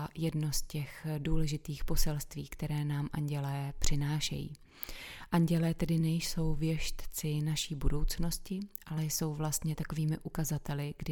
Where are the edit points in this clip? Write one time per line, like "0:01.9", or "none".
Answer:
none